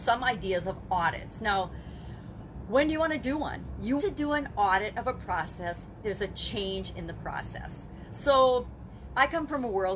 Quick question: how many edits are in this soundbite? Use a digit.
2